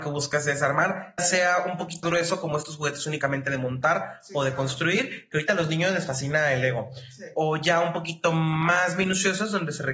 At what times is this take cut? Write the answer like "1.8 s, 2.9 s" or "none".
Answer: 1.2 s, 2.0 s